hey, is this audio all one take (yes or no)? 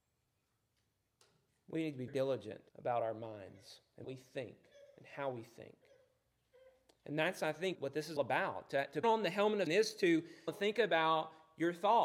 no